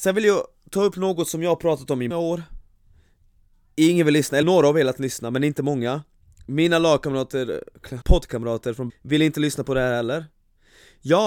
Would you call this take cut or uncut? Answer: cut